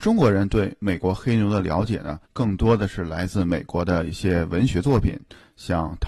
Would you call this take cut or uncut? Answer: cut